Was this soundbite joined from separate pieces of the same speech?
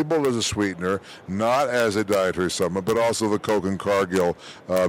no; 0 cuts

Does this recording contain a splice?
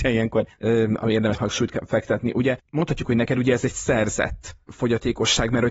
yes; 1 cut; at 1.3 s

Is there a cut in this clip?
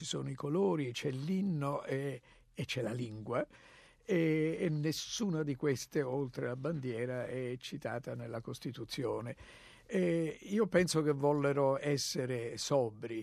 no; 0 cuts

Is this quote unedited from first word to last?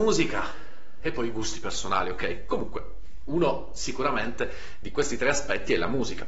yes; 0 cuts

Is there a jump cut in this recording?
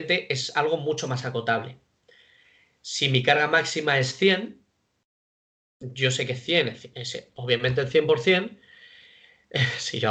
no; 0 cuts

